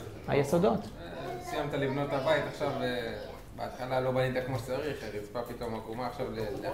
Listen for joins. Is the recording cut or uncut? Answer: uncut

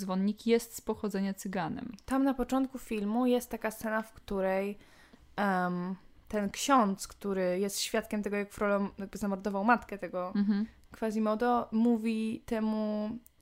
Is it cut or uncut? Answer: uncut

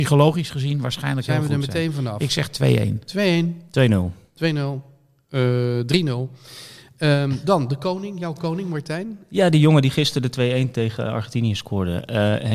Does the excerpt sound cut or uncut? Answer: uncut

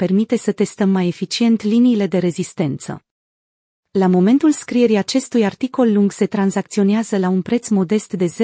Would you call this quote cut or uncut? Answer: uncut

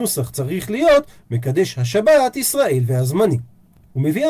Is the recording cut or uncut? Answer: uncut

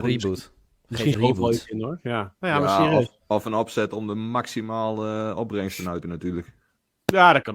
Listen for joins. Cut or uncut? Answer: cut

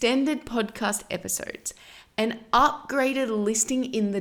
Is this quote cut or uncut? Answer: uncut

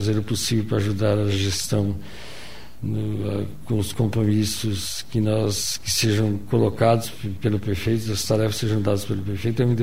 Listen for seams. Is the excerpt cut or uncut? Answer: uncut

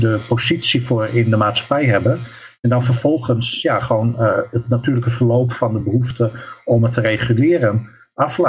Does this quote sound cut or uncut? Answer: uncut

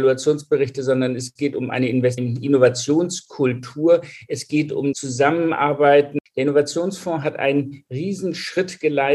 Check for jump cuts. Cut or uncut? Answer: cut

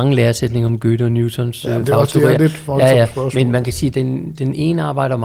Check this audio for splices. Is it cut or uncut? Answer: cut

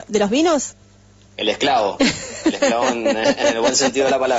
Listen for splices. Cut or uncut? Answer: uncut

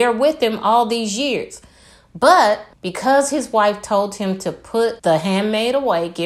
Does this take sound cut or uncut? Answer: cut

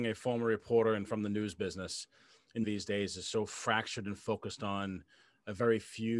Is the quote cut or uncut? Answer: cut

